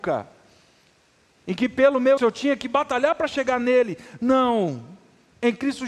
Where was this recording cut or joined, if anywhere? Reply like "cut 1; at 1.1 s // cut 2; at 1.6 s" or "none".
cut 1; at 2.2 s